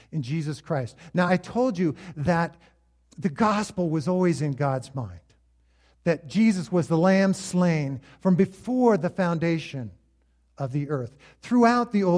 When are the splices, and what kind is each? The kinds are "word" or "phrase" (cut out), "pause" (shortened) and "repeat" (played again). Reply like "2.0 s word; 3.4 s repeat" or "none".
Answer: none